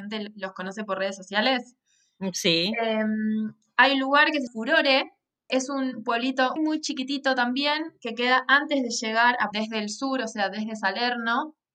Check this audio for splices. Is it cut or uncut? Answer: cut